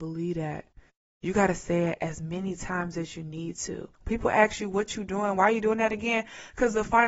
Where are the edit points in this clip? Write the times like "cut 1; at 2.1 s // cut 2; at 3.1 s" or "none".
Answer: cut 1; at 2.0 s // cut 2; at 3.9 s